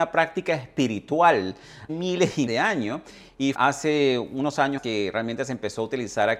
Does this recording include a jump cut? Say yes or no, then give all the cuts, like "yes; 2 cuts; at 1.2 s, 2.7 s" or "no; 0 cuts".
yes; 4 cuts; at 1.9 s, 2.5 s, 3.5 s, 4.8 s